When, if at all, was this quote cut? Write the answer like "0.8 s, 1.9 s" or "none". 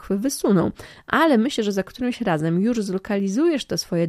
none